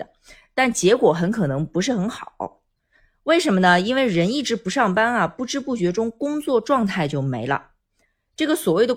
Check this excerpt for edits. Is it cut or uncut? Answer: uncut